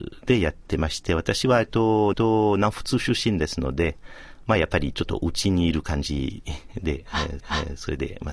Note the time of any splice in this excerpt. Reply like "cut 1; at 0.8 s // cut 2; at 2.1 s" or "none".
cut 1; at 2.1 s // cut 2; at 7.4 s